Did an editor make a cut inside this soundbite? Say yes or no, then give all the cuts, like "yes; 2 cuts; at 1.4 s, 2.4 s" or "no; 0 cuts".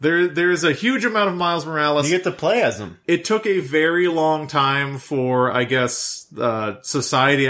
no; 0 cuts